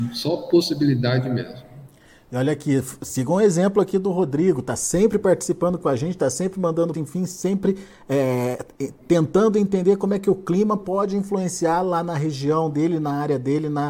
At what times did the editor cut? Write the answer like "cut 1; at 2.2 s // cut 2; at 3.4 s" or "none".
cut 1; at 6.9 s